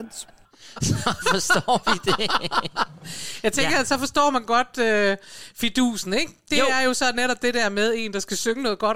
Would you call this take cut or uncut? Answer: uncut